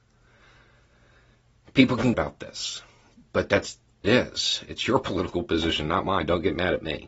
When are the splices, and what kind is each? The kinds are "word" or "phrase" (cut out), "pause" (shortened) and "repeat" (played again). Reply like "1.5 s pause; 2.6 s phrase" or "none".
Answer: 2.1 s phrase; 4.0 s phrase